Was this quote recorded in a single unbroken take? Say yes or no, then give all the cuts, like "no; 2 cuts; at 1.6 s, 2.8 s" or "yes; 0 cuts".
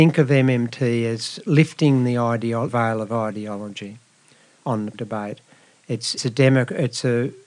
no; 3 cuts; at 2.7 s, 4.9 s, 6.2 s